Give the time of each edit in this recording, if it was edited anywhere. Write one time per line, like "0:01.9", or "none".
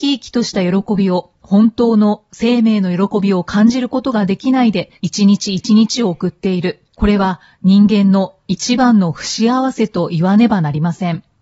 0:01.4
0:05.0
0:06.9